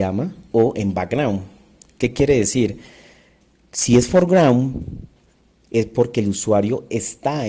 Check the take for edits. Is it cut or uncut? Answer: uncut